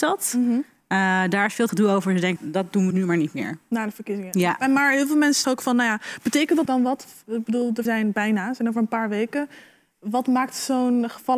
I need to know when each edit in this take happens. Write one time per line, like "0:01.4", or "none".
0:01.7
0:02.4
0:02.9
0:05.4
0:06.7
0:07.9

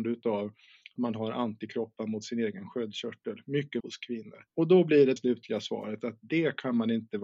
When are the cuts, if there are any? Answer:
0:01.0
0:03.8
0:04.5
0:05.2

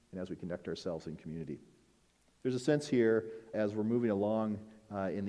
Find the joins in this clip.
0:02.1
0:03.5

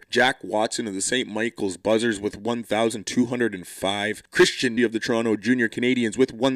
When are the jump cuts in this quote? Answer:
0:04.8

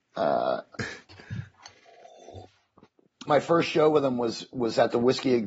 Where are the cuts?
0:03.3

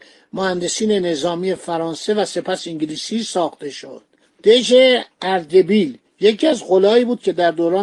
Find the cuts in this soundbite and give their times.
none

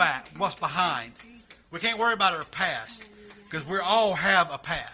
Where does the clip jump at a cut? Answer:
none

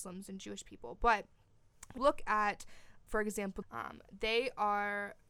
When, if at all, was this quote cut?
0:02.0
0:03.1
0:03.6

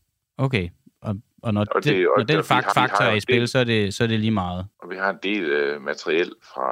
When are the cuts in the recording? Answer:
0:02.7
0:04.7

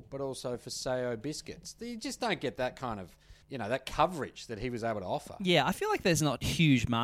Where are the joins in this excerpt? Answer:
0:03.4

